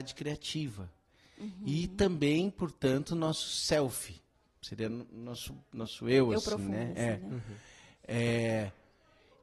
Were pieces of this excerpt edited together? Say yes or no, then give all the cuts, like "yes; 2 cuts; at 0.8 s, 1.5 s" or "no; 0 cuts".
no; 0 cuts